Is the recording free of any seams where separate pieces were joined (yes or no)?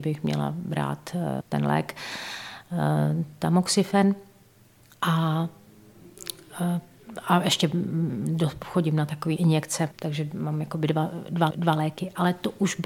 no